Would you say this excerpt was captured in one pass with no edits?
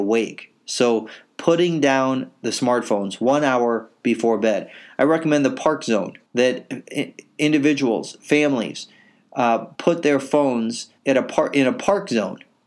no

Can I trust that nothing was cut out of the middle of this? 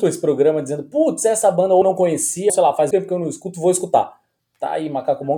no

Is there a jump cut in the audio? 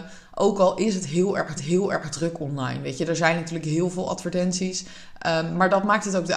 yes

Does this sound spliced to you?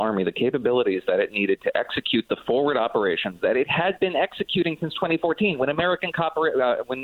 no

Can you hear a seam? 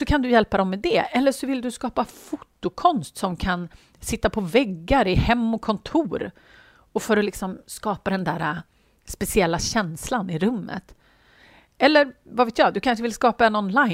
no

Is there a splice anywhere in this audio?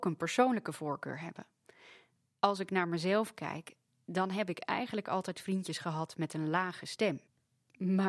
no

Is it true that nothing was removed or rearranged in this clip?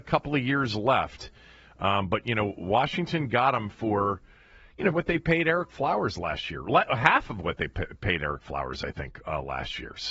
no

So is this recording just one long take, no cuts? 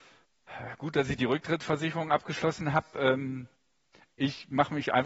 yes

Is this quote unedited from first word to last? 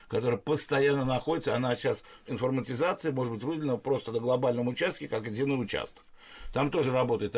no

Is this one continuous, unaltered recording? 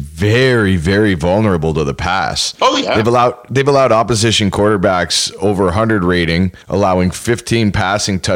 no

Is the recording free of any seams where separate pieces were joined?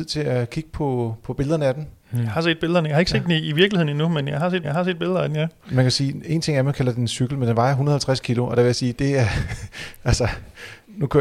no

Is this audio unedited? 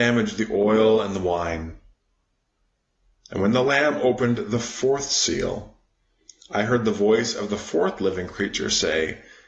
yes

